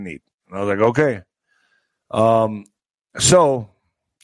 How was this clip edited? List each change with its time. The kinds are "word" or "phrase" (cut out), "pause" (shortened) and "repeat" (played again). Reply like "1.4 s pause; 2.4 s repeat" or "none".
none